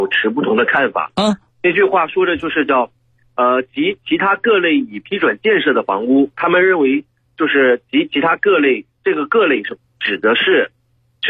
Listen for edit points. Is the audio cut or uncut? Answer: uncut